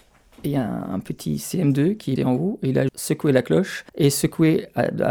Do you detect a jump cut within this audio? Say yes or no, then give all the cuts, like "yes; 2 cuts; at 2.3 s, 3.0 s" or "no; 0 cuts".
yes; 3 cuts; at 2.2 s, 2.9 s, 3.9 s